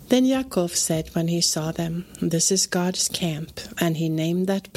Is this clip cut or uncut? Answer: uncut